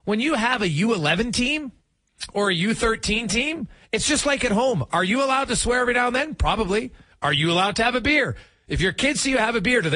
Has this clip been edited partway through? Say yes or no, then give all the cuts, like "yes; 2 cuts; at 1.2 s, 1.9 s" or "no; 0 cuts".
no; 0 cuts